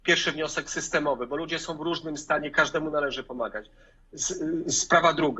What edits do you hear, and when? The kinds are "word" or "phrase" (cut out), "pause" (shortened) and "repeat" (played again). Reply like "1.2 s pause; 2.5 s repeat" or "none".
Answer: none